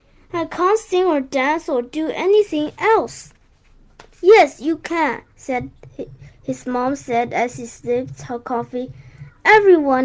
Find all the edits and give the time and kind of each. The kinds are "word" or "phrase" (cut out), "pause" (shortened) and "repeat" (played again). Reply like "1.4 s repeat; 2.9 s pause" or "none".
4.1 s pause; 5.3 s pause